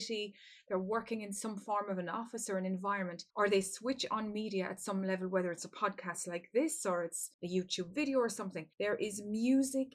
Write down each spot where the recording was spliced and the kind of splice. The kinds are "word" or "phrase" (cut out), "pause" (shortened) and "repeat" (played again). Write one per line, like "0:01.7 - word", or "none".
0:03.3 - pause
0:07.3 - pause
0:08.7 - pause

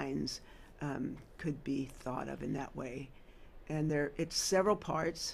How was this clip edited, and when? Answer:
none

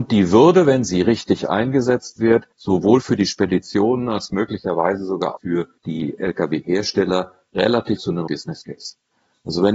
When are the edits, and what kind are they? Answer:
0:02.5 - pause
0:05.4 - word
0:05.8 - pause
0:08.0 - word
0:08.3 - word

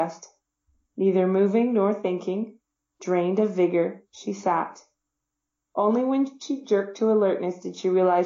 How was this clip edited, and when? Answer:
none

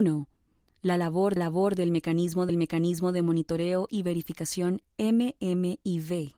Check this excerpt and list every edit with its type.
0:01.4 - repeat
0:02.5 - repeat

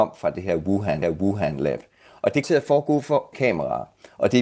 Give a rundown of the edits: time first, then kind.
0:01.0 - repeat
0:02.4 - word
0:03.3 - word

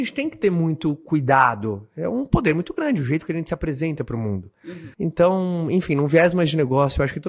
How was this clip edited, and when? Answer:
0:04.9 - pause

